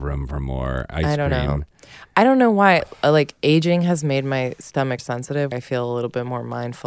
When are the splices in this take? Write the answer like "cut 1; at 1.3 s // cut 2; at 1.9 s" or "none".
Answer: cut 1; at 5.0 s // cut 2; at 5.5 s